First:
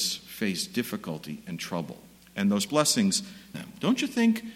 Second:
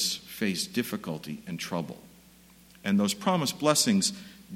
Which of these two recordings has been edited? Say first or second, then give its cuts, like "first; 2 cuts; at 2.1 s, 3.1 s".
first; 3 cuts; at 2.2 s, 2.7 s, 3.5 s